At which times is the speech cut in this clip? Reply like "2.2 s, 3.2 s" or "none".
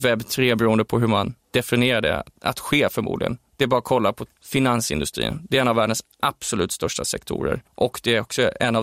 4.3 s, 7.7 s